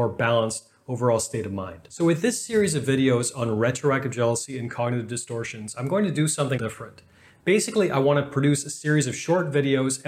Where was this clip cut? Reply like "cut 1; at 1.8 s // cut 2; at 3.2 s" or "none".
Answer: cut 1; at 6.6 s

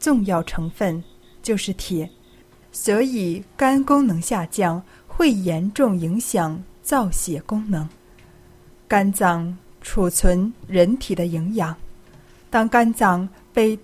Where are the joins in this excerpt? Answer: cut 1; at 2.5 s

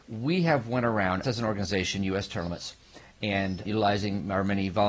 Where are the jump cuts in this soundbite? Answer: cut 1; at 1.2 s // cut 2; at 3.6 s

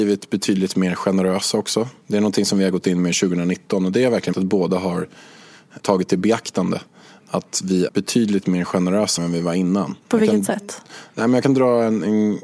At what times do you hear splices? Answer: cut 1; at 2.0 s // cut 2; at 4.3 s // cut 3; at 5.8 s // cut 4; at 7.9 s // cut 5; at 9.2 s // cut 6; at 10.0 s

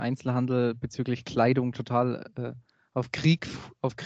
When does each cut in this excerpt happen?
none

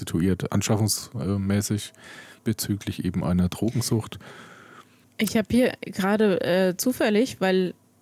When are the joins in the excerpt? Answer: cut 1; at 2.4 s // cut 2; at 5.0 s

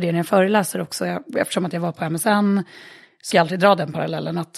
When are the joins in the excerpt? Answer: cut 1; at 3.3 s

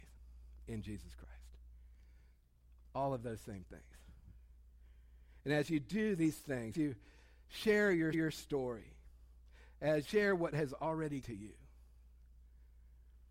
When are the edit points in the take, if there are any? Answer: cut 1; at 6.7 s // cut 2; at 8.1 s // cut 3; at 10.0 s // cut 4; at 10.5 s // cut 5; at 11.2 s

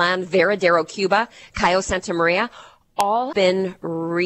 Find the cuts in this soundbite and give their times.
cut 1; at 3.3 s

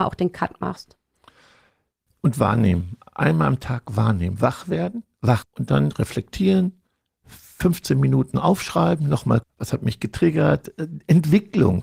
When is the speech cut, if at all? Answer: cut 1; at 5.4 s // cut 2; at 9.4 s

